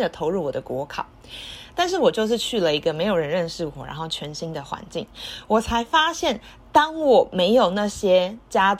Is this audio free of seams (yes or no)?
yes